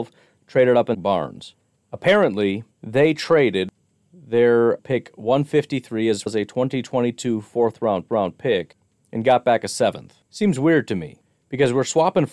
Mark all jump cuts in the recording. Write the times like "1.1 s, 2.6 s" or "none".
0.9 s, 2.7 s, 4.8 s, 6.3 s, 8.1 s, 10.3 s

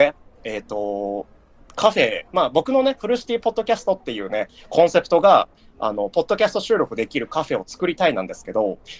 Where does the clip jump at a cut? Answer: 2.3 s

